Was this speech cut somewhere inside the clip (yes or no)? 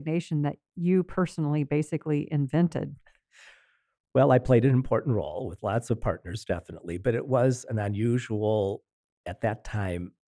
no